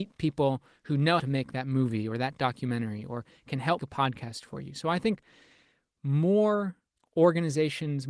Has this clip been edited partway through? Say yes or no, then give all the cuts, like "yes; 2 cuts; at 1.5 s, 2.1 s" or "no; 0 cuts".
yes; 3 cuts; at 1.2 s, 3.8 s, 6.9 s